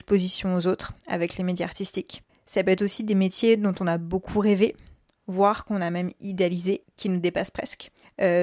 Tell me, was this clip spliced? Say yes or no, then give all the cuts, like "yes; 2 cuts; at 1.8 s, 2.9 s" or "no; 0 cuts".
no; 0 cuts